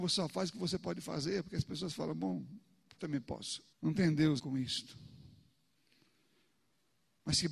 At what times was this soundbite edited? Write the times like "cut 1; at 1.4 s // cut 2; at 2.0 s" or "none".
cut 1; at 3.0 s // cut 2; at 3.7 s // cut 3; at 4.4 s